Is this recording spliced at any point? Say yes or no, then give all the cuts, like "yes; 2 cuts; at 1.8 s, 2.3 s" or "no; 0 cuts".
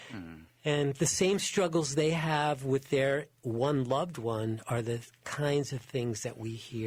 no; 0 cuts